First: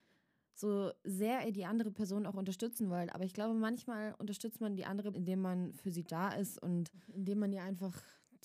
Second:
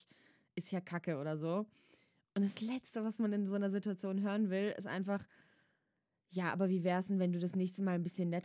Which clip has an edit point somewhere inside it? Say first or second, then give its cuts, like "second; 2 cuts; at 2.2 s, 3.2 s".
first; 1 cut; at 5.1 s